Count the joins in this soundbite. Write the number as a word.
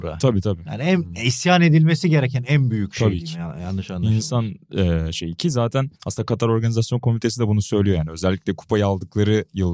one